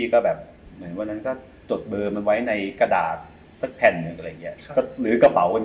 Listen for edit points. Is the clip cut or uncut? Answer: uncut